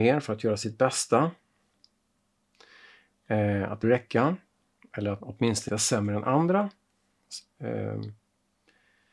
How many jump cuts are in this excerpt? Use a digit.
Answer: 3